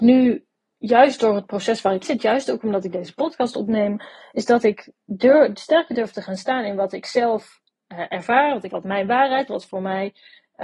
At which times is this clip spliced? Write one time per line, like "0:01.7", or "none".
0:02.0
0:08.7
0:09.5